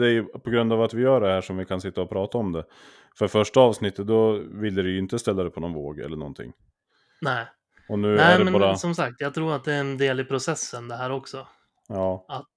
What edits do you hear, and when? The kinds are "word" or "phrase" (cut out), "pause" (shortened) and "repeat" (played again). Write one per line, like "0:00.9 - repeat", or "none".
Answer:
none